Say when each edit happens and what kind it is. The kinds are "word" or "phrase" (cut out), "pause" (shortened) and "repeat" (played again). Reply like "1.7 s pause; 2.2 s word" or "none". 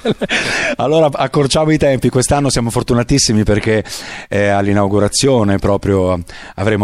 none